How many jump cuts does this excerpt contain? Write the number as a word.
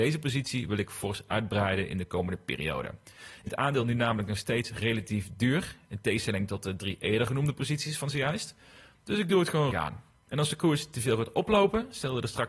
two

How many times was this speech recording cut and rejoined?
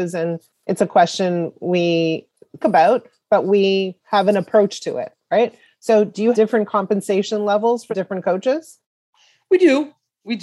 three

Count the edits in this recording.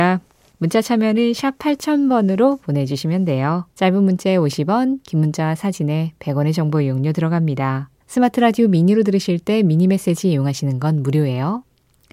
two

